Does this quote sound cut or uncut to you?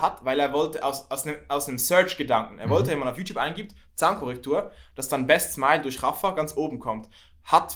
uncut